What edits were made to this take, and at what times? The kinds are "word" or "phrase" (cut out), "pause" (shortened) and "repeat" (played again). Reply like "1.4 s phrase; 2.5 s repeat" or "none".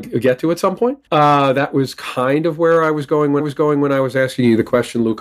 1.1 s pause; 3.4 s repeat